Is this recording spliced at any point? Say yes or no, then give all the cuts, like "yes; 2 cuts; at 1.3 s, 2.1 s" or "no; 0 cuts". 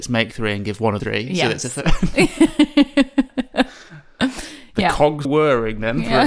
yes; 2 cuts; at 1.0 s, 5.2 s